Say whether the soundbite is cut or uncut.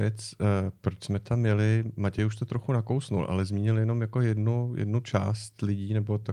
uncut